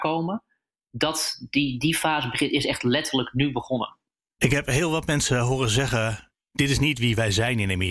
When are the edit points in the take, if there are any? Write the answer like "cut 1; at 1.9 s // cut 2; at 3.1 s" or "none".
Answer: none